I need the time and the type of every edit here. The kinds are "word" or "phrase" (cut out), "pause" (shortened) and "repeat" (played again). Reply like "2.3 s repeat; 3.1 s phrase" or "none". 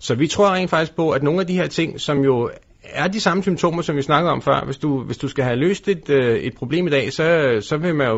none